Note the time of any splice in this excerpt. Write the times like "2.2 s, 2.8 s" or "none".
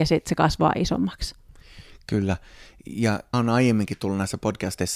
3.3 s